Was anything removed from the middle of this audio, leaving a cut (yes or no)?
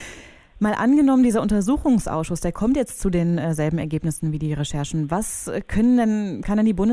no